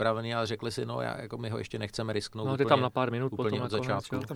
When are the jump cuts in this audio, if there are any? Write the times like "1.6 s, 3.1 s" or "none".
none